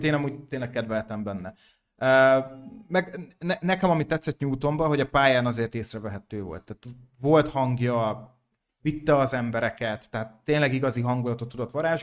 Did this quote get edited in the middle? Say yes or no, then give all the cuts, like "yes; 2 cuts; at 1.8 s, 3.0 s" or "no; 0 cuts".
no; 0 cuts